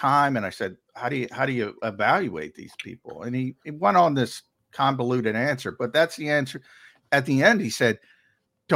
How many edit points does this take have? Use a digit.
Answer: 0